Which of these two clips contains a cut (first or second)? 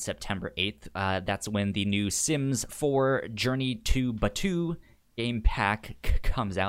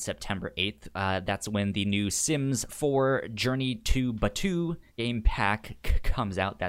second